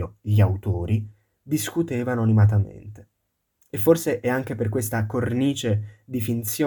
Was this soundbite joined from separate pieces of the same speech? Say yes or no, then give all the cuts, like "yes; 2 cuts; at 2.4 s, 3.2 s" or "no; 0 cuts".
no; 0 cuts